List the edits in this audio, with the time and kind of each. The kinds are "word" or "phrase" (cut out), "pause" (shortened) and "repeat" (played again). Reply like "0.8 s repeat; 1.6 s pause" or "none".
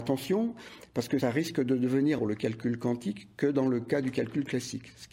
2.2 s phrase